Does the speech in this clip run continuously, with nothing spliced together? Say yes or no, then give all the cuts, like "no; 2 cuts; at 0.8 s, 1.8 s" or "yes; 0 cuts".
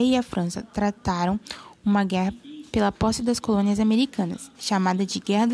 yes; 0 cuts